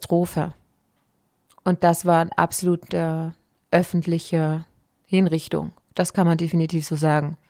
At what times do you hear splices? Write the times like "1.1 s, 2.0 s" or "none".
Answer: none

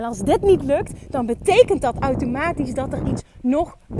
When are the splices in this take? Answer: none

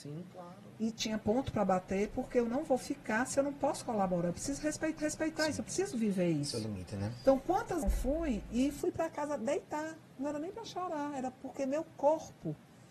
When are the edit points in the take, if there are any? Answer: 5.0 s, 7.8 s

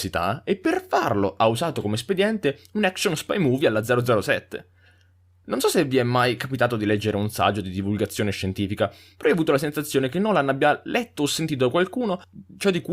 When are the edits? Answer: none

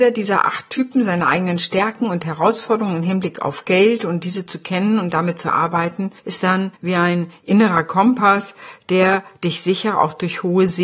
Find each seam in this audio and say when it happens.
6.2 s, 6.7 s

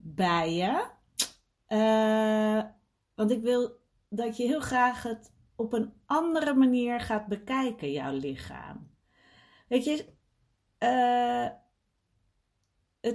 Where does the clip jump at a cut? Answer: none

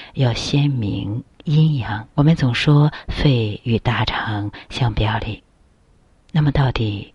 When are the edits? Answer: 2.1 s

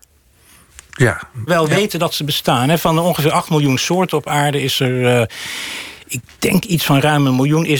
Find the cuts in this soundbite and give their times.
1.5 s

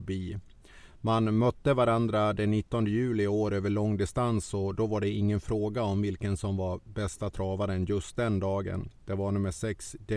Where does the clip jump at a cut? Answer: none

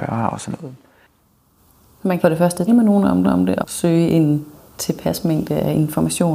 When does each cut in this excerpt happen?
1.6 s, 2.2 s, 2.7 s, 3.2 s, 3.6 s

